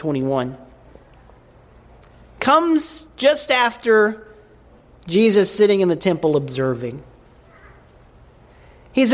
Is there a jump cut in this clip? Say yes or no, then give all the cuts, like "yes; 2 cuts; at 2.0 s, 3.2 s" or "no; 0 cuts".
no; 0 cuts